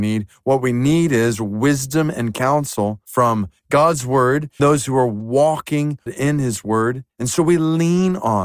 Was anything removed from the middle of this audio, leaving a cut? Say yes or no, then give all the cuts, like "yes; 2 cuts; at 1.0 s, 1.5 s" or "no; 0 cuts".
yes; 4 cuts; at 3.0 s, 4.6 s, 6.1 s, 7.1 s